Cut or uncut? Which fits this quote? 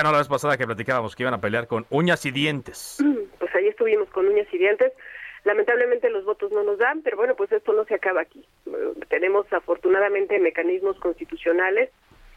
uncut